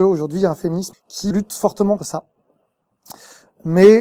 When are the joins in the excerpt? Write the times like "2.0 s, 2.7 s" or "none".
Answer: 0.9 s, 1.3 s, 2.0 s